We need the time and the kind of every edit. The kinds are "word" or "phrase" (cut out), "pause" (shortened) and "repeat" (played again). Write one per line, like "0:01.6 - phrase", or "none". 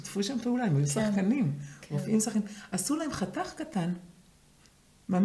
none